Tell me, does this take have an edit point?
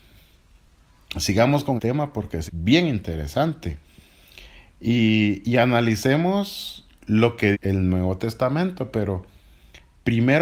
yes; 3 cuts; at 1.8 s, 2.5 s, 7.5 s

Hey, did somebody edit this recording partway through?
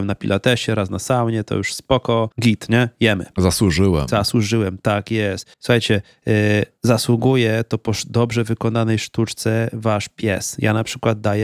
yes; 3 cuts; at 2.3 s, 5.5 s, 6.8 s

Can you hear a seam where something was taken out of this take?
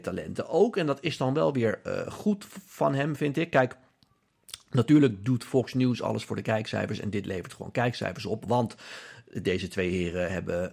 no; 0 cuts

